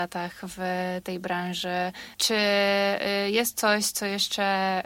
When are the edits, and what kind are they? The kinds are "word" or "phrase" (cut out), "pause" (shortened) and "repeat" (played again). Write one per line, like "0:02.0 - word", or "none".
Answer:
0:02.1 - pause